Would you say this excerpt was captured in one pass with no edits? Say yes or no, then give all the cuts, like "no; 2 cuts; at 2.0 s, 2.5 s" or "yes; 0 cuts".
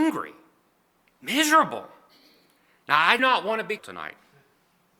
no; 2 cuts; at 3.2 s, 3.8 s